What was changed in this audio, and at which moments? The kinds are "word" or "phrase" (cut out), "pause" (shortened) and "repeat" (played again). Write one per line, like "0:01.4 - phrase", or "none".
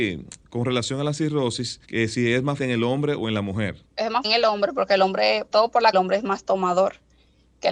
0:01.8 - pause
0:02.6 - word
0:03.8 - pause
0:04.2 - word
0:05.5 - word
0:05.9 - phrase